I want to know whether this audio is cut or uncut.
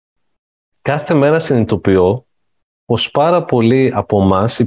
uncut